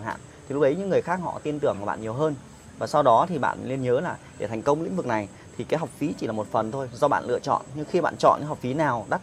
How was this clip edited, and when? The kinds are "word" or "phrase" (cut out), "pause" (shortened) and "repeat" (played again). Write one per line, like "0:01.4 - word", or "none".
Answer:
none